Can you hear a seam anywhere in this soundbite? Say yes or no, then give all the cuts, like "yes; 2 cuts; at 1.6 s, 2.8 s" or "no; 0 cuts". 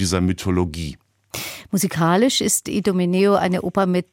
no; 0 cuts